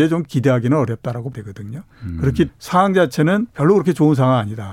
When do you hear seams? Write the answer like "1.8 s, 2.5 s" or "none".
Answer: 1.3 s, 2.5 s, 3.5 s